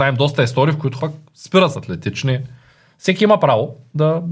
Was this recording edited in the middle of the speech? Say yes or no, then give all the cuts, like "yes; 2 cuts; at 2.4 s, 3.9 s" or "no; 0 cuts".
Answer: yes; 2 cuts; at 1.0 s, 1.7 s